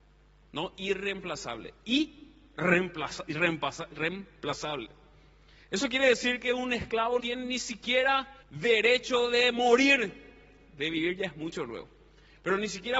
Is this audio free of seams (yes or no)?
no